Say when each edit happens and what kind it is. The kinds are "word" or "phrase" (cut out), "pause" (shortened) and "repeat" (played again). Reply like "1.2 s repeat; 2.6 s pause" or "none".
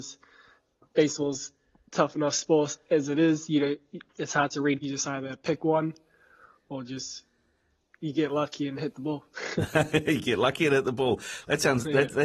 4.1 s pause; 4.8 s phrase; 8.0 s word